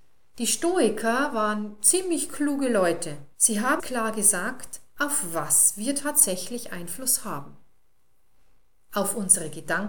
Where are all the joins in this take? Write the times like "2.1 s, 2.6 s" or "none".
3.3 s, 3.8 s